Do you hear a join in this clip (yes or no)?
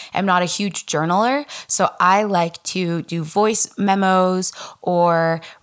no